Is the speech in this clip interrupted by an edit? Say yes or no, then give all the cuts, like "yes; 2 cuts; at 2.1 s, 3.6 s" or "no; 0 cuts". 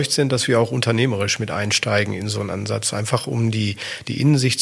no; 0 cuts